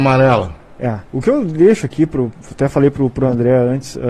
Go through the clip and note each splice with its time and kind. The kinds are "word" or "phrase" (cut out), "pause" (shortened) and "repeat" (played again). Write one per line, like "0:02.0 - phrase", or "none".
0:01.1 - pause